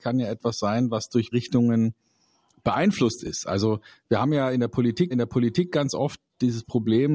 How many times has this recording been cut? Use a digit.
2